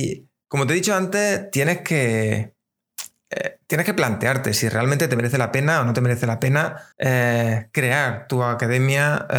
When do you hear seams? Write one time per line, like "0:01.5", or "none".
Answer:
0:06.9